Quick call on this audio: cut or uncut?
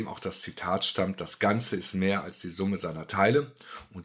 uncut